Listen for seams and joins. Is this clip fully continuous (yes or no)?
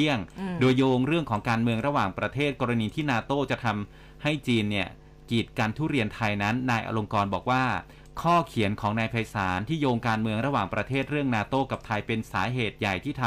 no